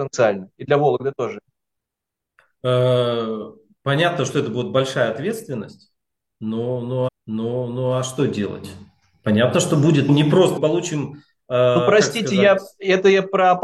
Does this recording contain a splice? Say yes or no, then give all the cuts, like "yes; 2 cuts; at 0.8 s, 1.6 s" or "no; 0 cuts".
yes; 3 cuts; at 7.1 s, 10.1 s, 10.6 s